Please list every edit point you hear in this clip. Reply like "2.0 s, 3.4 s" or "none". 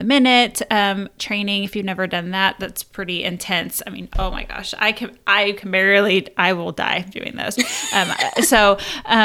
none